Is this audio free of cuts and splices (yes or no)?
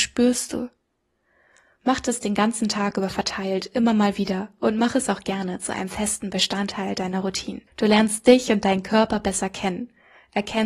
no